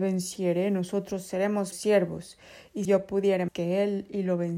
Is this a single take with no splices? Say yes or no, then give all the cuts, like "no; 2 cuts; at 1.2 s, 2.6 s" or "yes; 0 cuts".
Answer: no; 3 cuts; at 1.7 s, 2.8 s, 3.5 s